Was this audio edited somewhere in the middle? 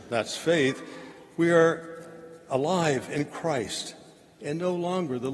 no; 0 cuts

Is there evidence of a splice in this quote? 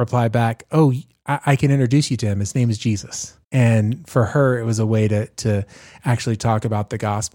yes; 1 cut; at 3.4 s

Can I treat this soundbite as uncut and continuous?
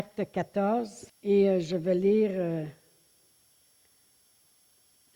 no; 1 cut; at 1.1 s

